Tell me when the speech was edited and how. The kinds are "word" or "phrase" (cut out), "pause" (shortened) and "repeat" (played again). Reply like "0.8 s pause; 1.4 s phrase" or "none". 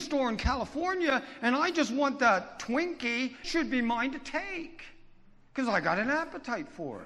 3.4 s word